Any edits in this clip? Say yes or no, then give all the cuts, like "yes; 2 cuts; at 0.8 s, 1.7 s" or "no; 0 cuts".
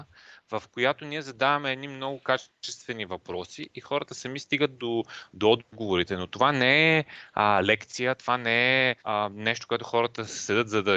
yes; 1 cut; at 9.0 s